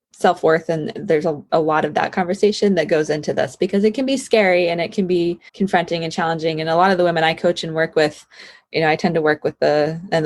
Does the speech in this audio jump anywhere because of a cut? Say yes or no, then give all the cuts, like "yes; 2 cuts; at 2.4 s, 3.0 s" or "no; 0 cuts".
yes; 2 cuts; at 1.5 s, 5.5 s